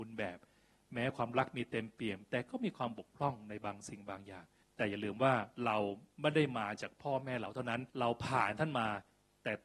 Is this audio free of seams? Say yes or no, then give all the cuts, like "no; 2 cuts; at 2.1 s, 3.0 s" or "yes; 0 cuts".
no; 2 cuts; at 4.6 s, 7.9 s